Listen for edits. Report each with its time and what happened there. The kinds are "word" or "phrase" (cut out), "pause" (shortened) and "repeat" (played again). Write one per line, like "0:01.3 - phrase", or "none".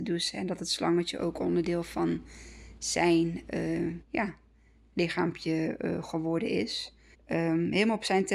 0:04.0 - pause
0:07.1 - pause